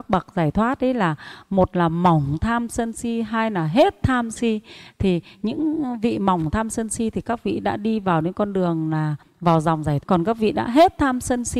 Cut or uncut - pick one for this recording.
cut